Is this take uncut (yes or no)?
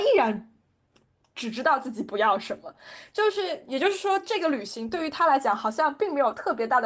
yes